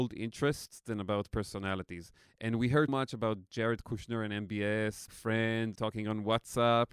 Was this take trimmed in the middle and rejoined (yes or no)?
yes